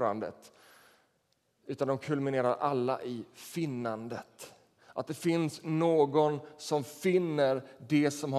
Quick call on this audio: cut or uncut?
uncut